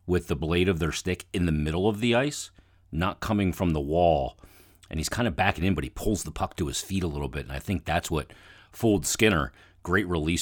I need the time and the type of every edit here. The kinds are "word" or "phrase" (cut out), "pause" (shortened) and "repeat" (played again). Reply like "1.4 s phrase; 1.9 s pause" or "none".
none